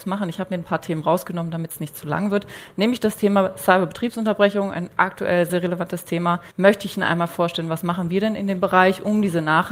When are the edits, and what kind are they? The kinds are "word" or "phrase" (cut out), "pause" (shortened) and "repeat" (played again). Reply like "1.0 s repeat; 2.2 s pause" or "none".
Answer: 5.5 s word; 6.5 s pause